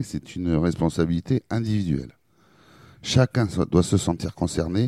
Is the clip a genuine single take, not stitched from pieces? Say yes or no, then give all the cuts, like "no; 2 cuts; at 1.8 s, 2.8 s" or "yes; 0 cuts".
yes; 0 cuts